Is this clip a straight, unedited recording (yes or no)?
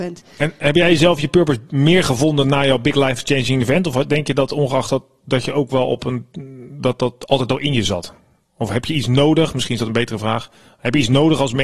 yes